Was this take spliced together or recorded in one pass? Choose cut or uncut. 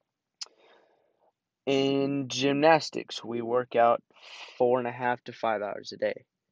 uncut